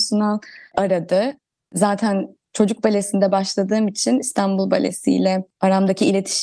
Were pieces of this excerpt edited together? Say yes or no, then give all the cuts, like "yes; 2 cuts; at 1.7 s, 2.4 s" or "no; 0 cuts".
no; 0 cuts